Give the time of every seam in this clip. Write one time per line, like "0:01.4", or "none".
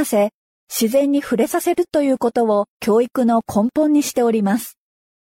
0:02.7